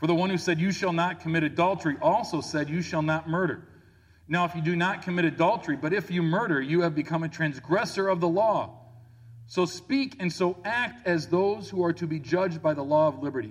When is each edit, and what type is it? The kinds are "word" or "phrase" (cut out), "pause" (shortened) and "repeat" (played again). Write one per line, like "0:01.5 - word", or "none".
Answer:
none